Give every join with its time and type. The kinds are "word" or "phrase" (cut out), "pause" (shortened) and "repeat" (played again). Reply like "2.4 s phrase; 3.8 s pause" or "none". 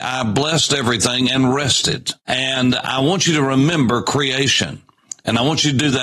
2.2 s pause